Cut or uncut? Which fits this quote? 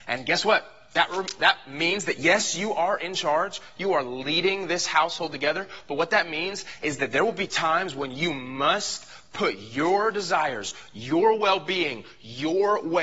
uncut